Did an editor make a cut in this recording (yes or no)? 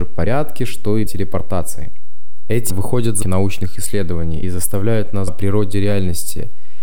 yes